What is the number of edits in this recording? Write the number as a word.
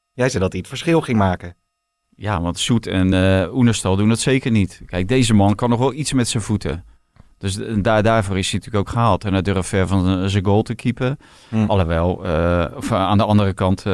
zero